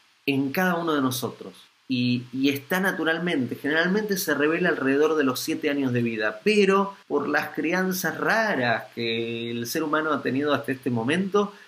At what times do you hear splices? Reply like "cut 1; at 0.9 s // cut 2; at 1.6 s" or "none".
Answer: cut 1; at 1.7 s // cut 2; at 7.0 s